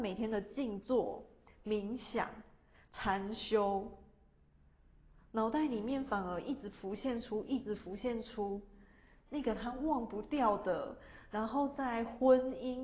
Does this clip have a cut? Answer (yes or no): no